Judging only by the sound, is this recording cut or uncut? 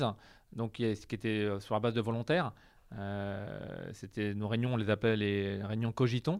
uncut